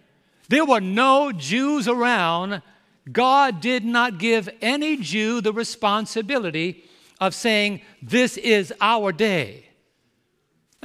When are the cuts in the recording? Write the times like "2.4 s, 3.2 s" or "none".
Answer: none